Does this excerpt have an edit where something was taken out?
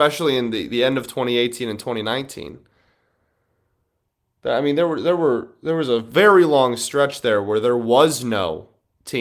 no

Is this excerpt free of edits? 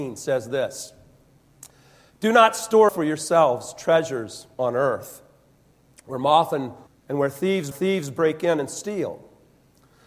no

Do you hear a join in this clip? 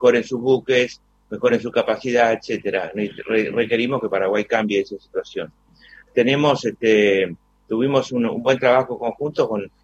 no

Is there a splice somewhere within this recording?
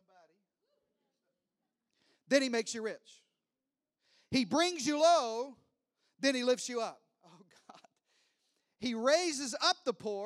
no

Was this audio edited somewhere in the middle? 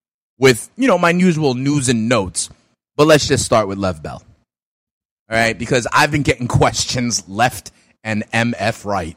no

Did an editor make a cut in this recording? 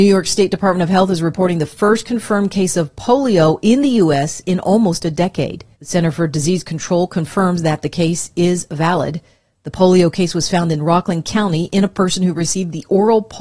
yes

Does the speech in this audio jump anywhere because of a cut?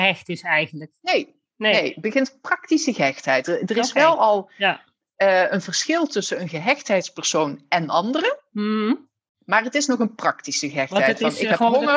no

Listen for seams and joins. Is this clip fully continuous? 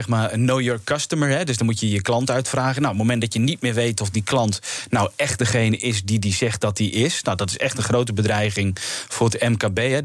yes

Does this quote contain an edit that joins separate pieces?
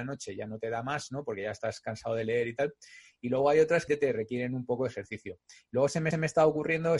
yes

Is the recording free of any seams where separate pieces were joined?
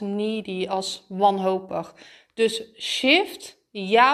yes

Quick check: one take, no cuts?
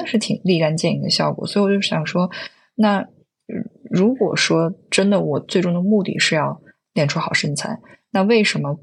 yes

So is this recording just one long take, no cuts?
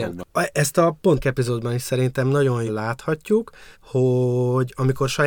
no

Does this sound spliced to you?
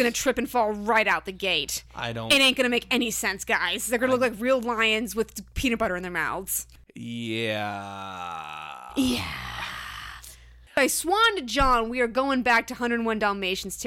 no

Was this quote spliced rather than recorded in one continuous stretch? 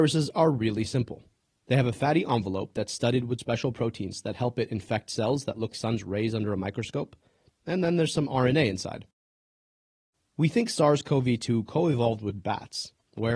yes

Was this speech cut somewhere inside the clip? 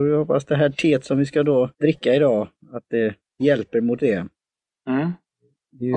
yes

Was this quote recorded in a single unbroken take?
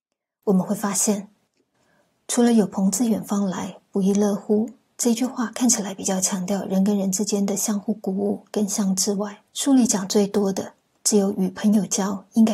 no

